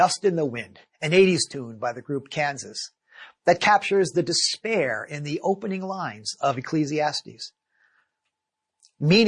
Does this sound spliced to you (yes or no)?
no